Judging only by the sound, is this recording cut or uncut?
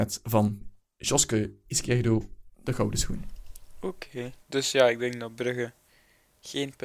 uncut